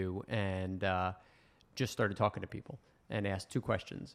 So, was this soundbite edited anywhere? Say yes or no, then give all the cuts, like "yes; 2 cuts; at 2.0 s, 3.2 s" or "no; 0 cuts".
no; 0 cuts